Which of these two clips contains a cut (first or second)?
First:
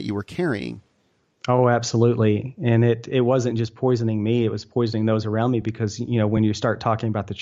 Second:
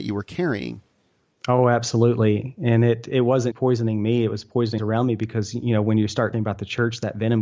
second